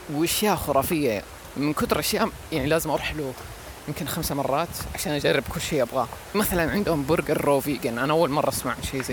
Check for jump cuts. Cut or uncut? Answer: cut